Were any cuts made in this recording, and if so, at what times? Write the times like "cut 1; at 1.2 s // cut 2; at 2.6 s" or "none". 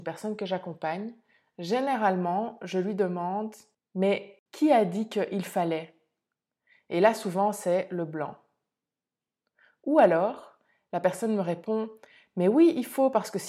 none

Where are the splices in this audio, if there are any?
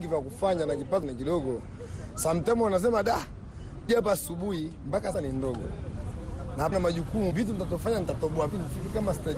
cut 1; at 1.0 s // cut 2; at 3.9 s // cut 3; at 5.1 s // cut 4; at 6.7 s // cut 5; at 7.3 s // cut 6; at 8.5 s

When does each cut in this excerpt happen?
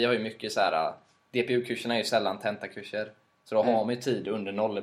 none

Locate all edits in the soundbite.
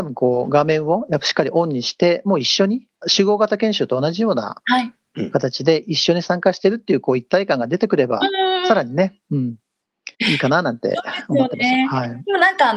cut 1; at 2.9 s // cut 2; at 9.2 s // cut 3; at 10.1 s

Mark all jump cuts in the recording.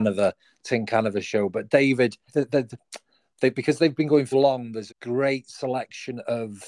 cut 1; at 2.3 s // cut 2; at 4.3 s // cut 3; at 4.9 s

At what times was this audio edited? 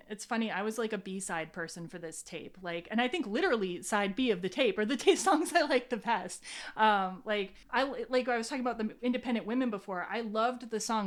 cut 1; at 7.6 s

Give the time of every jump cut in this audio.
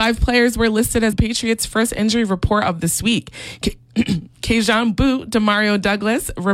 cut 1; at 1.1 s

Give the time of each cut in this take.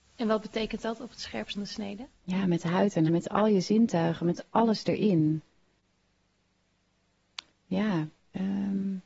cut 1; at 1.5 s // cut 2; at 3.1 s

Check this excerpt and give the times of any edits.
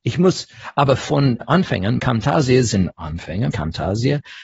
cut 1; at 1.0 s // cut 2; at 1.4 s // cut 3; at 2.0 s // cut 4; at 3.5 s

